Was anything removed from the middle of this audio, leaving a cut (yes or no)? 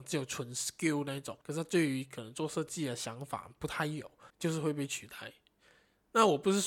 yes